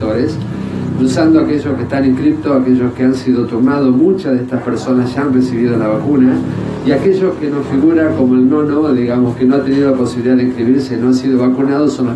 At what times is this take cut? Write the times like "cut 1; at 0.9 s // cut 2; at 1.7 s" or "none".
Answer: none